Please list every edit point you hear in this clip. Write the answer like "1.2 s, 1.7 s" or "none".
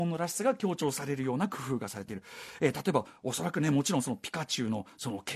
none